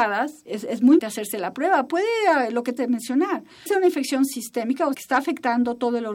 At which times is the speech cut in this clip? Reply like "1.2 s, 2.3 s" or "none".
1.0 s, 1.9 s, 2.8 s, 3.7 s, 4.9 s